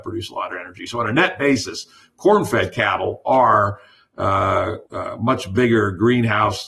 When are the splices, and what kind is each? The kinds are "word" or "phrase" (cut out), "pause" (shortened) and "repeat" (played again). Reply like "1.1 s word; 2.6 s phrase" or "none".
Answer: 4.9 s pause